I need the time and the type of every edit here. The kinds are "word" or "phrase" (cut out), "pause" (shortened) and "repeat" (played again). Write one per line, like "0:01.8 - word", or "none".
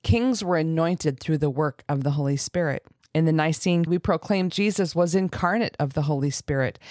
0:03.0 - pause
0:03.9 - word
0:04.5 - word